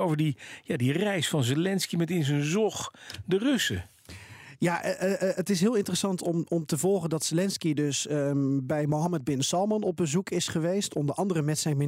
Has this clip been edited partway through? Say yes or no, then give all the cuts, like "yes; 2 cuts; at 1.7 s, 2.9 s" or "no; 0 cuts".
no; 0 cuts